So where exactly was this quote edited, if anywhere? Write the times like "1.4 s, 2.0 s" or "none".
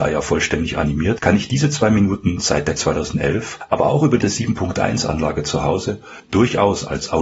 1.2 s, 2.8 s, 4.2 s